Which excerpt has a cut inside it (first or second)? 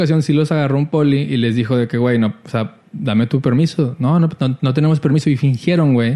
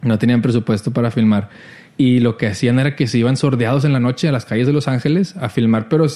second